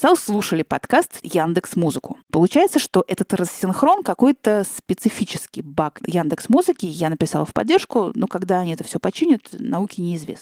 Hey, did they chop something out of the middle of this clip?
yes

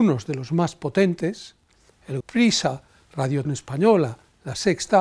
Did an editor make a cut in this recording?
yes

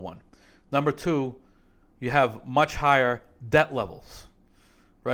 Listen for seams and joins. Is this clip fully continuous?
yes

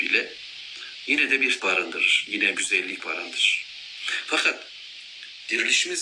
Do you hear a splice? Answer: yes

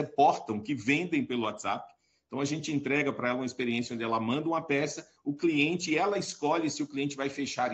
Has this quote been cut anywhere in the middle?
no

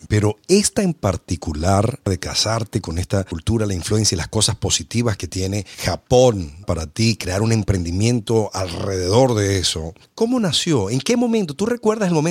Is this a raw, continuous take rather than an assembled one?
yes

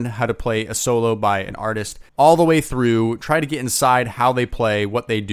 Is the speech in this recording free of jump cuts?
no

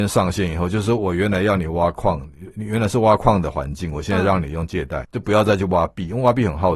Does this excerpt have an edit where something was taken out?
yes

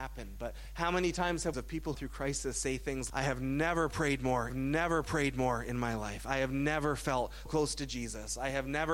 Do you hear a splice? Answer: yes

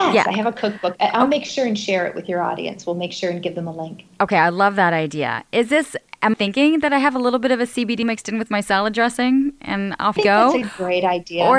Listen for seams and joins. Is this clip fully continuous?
no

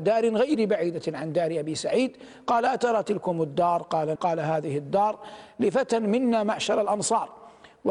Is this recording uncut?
no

